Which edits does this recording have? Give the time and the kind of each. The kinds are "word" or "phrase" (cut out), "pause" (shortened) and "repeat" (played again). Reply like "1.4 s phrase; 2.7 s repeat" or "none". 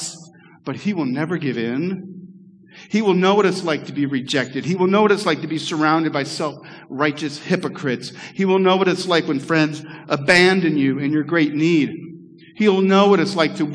none